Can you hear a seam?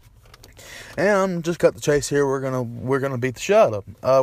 yes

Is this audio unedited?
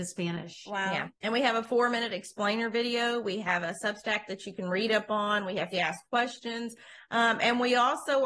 no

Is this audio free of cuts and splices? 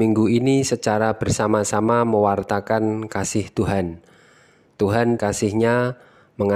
no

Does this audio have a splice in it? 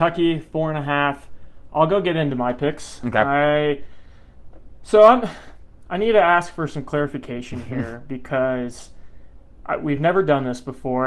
no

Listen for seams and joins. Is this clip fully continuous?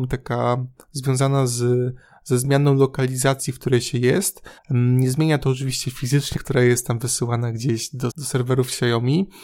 no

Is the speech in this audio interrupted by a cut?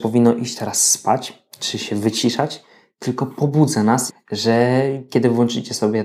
yes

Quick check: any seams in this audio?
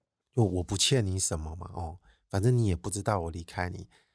no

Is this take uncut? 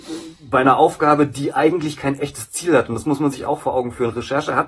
yes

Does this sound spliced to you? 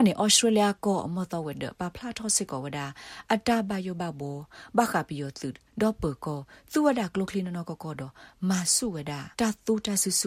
yes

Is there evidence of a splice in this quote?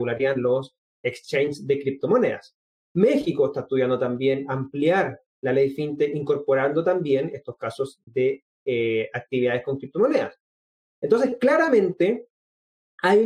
no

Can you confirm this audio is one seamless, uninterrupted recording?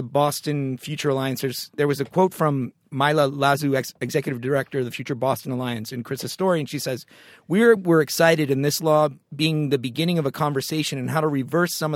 yes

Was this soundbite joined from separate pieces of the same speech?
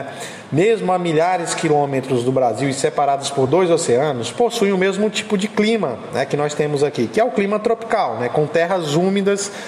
no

